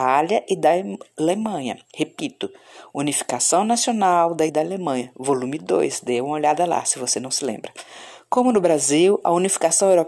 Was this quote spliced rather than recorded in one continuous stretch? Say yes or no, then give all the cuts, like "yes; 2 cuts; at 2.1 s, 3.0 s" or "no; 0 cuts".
yes; 2 cuts; at 1.8 s, 4.5 s